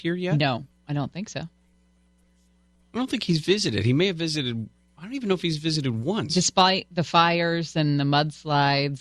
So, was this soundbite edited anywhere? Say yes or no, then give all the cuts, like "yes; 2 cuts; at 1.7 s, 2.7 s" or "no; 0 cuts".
no; 0 cuts